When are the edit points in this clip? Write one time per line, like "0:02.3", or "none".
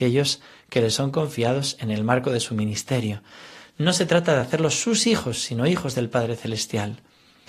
none